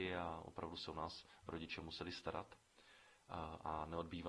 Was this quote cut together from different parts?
no; 0 cuts

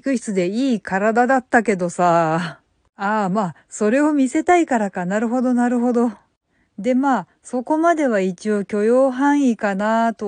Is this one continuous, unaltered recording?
yes; 0 cuts

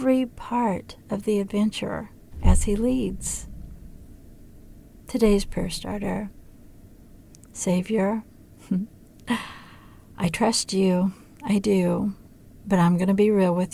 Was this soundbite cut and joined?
no; 0 cuts

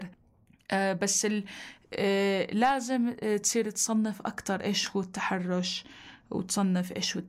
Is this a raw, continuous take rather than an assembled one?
yes; 0 cuts

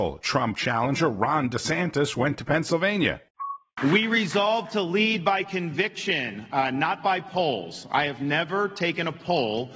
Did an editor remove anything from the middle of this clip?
no; 0 cuts

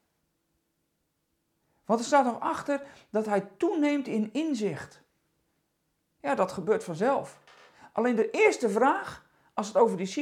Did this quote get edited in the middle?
no; 0 cuts

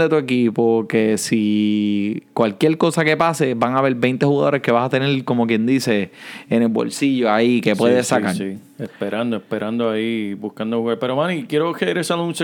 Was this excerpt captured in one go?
yes; 0 cuts

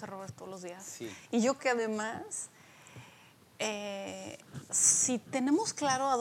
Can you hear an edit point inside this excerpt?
yes; 1 cut; at 1.6 s

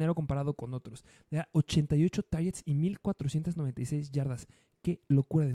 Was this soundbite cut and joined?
no; 0 cuts

